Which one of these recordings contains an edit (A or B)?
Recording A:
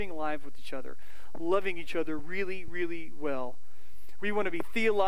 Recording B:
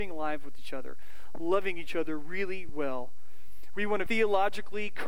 B